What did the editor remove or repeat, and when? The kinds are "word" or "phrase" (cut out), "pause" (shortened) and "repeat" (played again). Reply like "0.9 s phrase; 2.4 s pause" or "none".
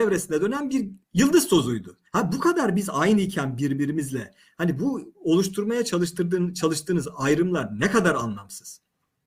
1.0 s pause; 2.1 s pause